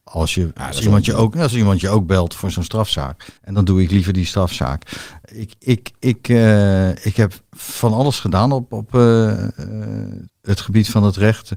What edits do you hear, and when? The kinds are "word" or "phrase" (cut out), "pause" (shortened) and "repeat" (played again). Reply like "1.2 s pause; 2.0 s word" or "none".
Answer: 3.4 s pause; 8.9 s word; 10.3 s pause